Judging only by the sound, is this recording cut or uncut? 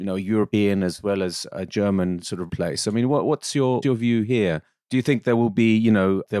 cut